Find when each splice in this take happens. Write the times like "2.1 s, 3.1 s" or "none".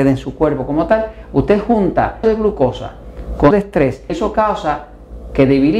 2.2 s, 3.5 s, 4.1 s